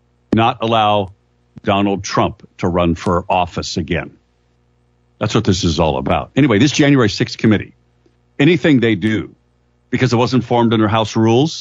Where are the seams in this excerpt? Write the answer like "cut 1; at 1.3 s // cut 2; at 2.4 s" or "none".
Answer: none